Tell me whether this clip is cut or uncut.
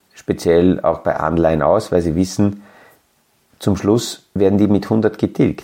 uncut